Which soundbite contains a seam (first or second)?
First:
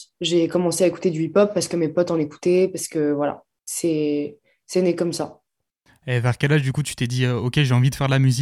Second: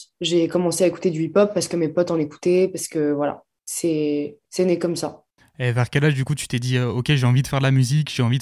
second